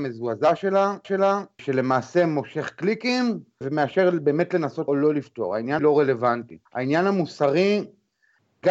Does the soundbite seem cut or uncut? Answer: cut